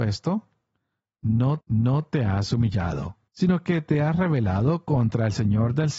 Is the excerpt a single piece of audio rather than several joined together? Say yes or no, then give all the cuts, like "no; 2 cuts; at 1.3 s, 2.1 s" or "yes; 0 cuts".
no; 2 cuts; at 1.6 s, 3.3 s